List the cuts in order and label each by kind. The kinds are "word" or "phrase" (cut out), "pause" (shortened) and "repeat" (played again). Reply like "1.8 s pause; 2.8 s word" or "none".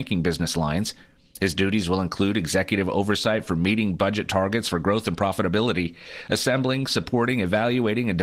none

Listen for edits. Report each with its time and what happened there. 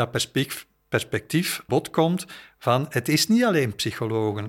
1.7 s word

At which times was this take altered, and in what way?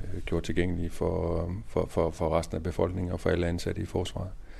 none

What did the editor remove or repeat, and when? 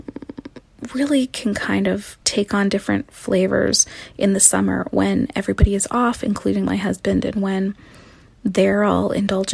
2.2 s pause

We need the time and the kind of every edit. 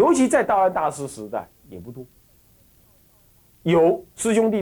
1.6 s pause

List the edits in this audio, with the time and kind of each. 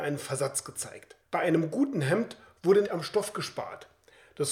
1.2 s pause; 2.8 s word

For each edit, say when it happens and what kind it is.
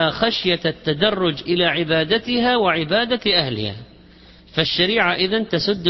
none

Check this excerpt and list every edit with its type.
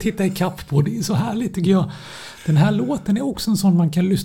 none

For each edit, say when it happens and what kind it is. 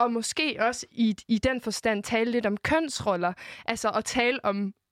none

